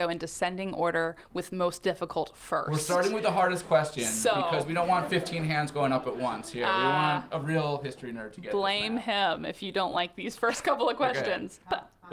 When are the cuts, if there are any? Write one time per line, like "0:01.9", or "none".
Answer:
none